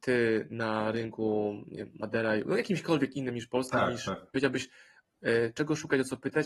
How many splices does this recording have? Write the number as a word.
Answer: zero